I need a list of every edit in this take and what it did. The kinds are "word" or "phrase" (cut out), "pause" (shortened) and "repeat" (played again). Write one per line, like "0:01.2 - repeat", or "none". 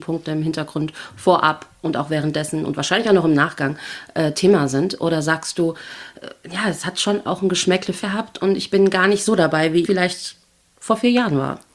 0:08.0 - word
0:09.8 - phrase